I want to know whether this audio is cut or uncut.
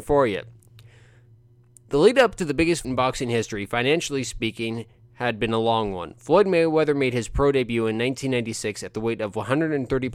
cut